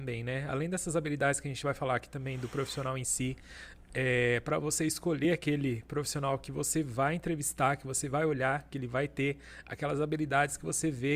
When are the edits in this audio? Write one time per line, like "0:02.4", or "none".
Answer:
none